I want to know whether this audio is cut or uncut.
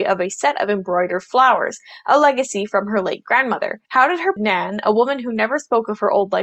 cut